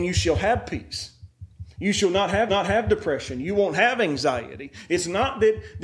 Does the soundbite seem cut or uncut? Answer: cut